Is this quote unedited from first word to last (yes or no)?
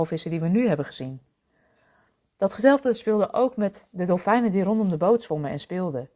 yes